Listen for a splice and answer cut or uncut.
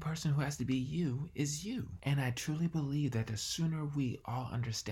uncut